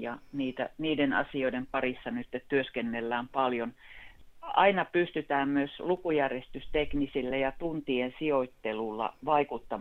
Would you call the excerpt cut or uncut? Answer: uncut